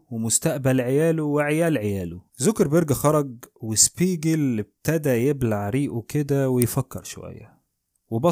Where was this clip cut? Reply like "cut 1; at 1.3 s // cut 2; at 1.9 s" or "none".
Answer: cut 1; at 2.3 s